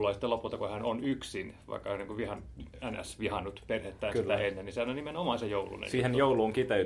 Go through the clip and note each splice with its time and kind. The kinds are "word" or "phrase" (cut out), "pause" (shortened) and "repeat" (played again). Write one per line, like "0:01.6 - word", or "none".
none